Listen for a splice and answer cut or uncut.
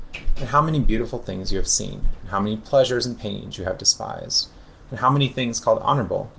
uncut